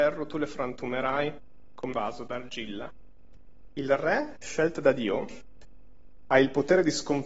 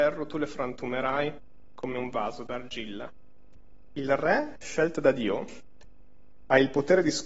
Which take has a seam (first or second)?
first